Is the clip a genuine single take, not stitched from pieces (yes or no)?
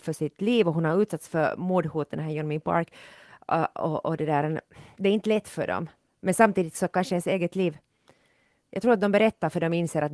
yes